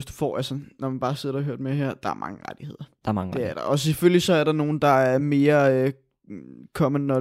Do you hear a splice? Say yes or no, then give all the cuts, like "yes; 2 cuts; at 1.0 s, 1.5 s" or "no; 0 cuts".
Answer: no; 0 cuts